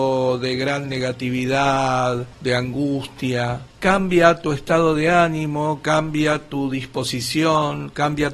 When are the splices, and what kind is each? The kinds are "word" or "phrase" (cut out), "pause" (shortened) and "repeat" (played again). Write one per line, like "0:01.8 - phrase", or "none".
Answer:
0:02.3 - pause
0:03.7 - pause